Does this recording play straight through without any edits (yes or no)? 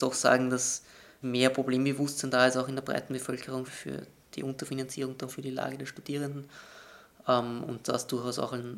no